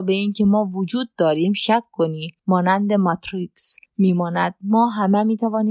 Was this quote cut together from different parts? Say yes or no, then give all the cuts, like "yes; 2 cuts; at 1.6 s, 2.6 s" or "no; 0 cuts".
yes; 2 cuts; at 2.4 s, 3.9 s